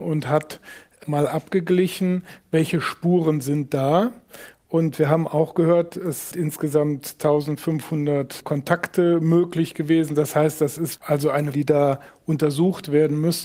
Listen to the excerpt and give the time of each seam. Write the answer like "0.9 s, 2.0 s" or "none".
6.3 s, 11.0 s, 11.5 s